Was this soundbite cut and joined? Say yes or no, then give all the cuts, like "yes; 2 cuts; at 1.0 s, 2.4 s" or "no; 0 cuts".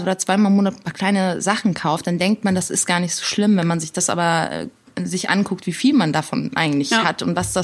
no; 0 cuts